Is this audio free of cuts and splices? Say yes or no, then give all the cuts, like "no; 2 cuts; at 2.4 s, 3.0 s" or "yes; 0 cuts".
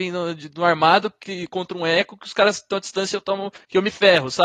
no; 1 cut; at 2.7 s